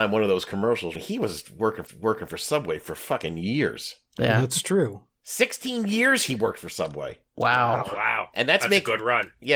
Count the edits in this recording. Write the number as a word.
two